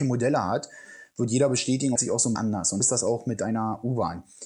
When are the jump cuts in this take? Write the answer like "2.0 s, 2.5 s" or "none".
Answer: 2.0 s, 2.4 s, 2.8 s